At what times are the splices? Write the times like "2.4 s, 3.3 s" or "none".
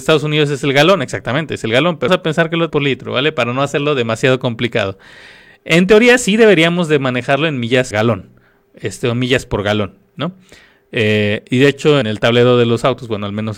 2.1 s, 2.7 s, 7.9 s, 12.0 s